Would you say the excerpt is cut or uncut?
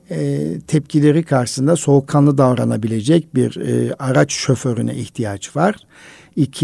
uncut